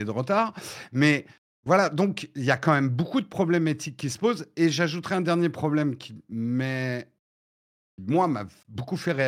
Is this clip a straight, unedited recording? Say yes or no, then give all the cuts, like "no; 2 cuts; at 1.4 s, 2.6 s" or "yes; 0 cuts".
yes; 0 cuts